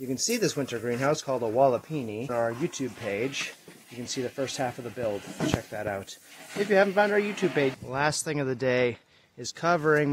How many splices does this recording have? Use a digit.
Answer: 3